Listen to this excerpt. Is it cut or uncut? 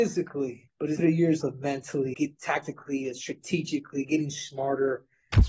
cut